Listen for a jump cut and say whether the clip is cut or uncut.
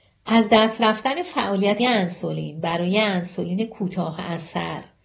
cut